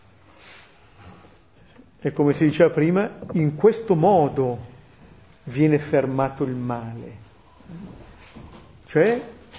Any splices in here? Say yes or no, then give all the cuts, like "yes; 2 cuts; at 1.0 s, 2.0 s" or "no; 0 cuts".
no; 0 cuts